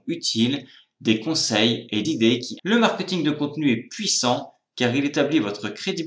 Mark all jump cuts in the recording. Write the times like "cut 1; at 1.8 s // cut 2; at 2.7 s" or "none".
cut 1; at 2.0 s // cut 2; at 2.6 s